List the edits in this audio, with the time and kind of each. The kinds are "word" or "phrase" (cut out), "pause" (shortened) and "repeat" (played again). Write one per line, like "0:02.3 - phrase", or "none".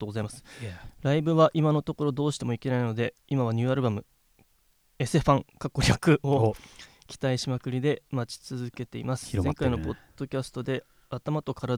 0:03.2 - pause